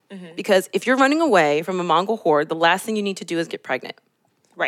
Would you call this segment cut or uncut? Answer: uncut